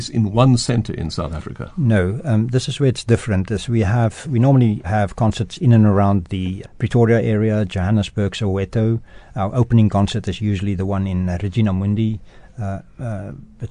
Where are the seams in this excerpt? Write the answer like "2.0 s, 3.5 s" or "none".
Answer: 4.2 s, 4.8 s, 6.6 s